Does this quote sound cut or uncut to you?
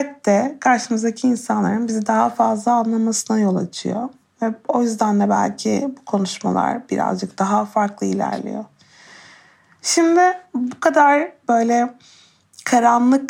uncut